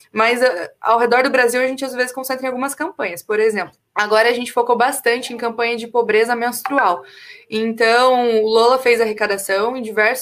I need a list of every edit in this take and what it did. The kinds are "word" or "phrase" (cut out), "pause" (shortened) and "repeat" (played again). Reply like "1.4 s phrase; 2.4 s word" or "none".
3.8 s pause